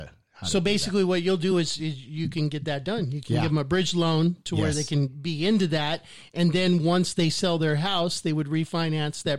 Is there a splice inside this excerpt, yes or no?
no